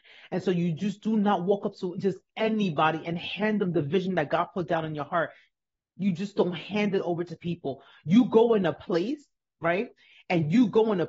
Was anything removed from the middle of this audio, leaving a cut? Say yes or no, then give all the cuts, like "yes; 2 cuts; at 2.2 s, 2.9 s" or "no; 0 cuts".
no; 0 cuts